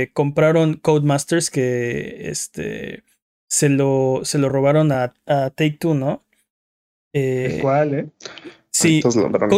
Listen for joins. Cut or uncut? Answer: uncut